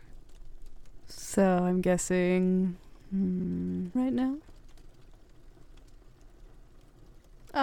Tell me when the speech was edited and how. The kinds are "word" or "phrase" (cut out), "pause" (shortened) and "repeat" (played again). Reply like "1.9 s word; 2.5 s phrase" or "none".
4.0 s phrase